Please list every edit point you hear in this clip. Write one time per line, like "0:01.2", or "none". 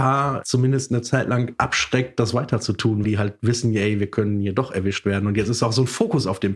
0:03.0